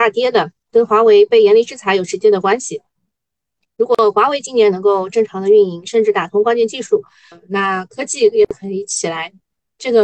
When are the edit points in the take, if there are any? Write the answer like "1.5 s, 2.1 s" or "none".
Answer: 7.3 s